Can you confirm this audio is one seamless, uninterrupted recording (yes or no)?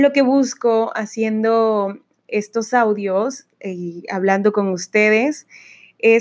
yes